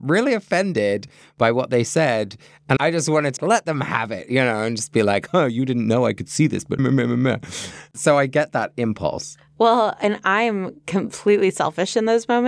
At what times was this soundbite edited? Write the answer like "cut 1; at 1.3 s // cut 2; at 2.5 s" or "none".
cut 1; at 2.8 s // cut 2; at 3.4 s // cut 3; at 6.8 s